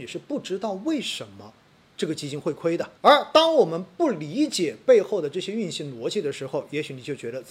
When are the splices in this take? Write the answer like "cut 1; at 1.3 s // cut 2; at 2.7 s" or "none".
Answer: cut 1; at 3.0 s